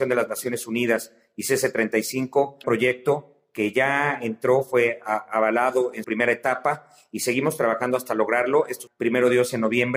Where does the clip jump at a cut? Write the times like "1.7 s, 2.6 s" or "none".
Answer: 2.6 s, 6.0 s, 8.9 s